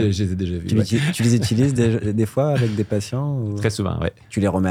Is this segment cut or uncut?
uncut